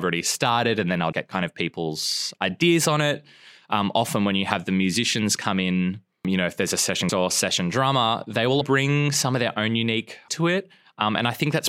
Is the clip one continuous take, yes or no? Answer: no